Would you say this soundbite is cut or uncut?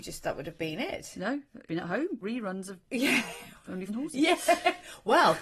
cut